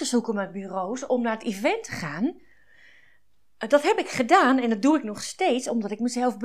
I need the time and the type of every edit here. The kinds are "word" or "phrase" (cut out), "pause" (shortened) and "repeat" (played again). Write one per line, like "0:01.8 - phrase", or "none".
none